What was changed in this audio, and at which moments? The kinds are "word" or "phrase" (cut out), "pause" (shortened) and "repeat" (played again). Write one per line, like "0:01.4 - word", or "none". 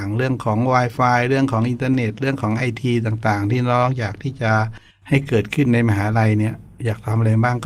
0:04.9 - pause

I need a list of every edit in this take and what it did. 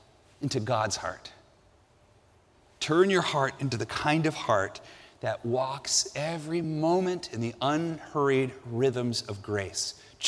none

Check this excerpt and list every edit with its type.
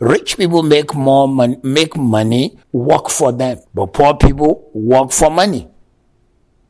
0:02.6 - pause
0:03.7 - pause

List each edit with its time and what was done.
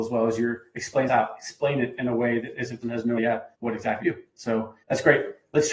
0:01.1 - word
0:02.8 - word
0:03.2 - word
0:03.5 - pause
0:04.0 - word
0:04.8 - pause

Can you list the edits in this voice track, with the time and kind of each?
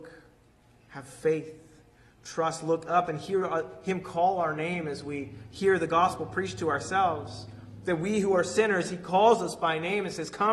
none

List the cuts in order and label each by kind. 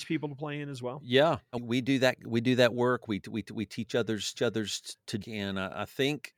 0:01.5 - word
0:03.4 - repeat
0:04.3 - repeat
0:05.2 - phrase

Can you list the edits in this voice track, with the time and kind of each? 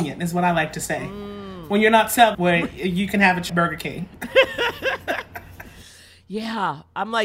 0:02.3 - word
0:03.5 - phrase

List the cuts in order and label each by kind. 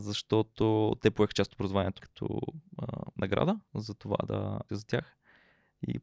0:02.0 - word
0:03.7 - pause
0:04.7 - word

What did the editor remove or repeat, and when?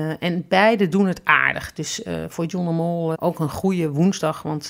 0:03.1 - word

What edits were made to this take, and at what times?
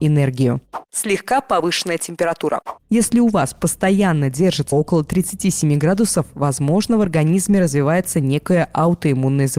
0:04.7 - word

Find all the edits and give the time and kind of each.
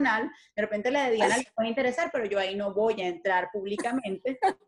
none

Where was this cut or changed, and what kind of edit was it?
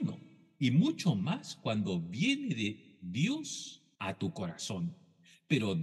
0:04.0 - pause

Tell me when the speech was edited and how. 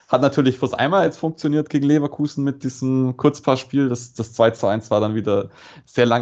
none

